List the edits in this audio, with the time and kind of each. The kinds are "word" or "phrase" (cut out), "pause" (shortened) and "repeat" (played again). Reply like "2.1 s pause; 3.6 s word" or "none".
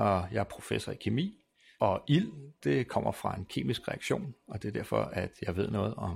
none